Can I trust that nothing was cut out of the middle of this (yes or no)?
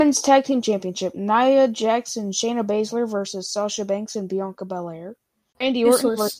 yes